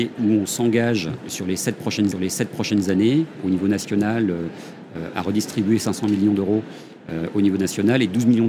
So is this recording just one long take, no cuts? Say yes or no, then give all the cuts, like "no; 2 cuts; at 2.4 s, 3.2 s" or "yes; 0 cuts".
no; 1 cut; at 2.1 s